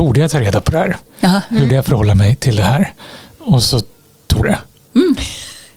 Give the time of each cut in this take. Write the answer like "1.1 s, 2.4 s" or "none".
1.7 s, 4.4 s